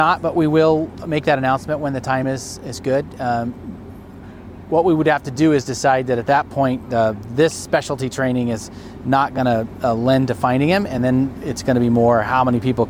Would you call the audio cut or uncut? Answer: uncut